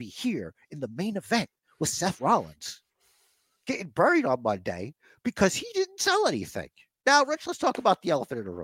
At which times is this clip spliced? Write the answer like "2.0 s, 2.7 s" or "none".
none